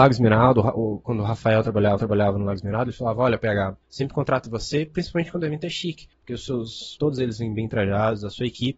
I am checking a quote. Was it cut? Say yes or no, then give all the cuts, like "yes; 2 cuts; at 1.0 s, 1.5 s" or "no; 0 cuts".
yes; 4 cuts; at 2.0 s, 3.8 s, 6.1 s, 7.0 s